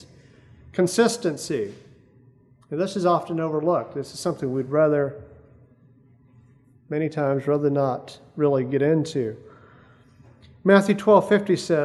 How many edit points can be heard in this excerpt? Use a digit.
0